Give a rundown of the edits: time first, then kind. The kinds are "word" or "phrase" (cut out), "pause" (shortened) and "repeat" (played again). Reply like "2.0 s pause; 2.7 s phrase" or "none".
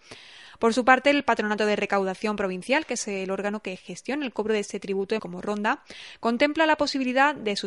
5.2 s word